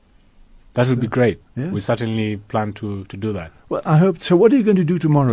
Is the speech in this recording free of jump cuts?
yes; 0 cuts

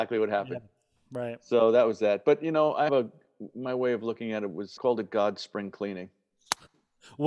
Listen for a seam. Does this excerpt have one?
yes; 2 cuts; at 2.9 s, 4.8 s

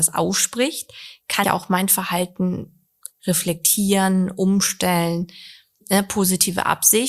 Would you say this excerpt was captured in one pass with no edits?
no; 2 cuts; at 1.4 s, 5.8 s

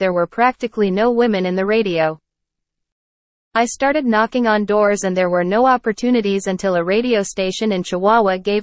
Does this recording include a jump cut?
no; 0 cuts

